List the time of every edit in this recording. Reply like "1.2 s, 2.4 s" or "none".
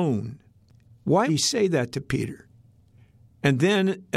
1.3 s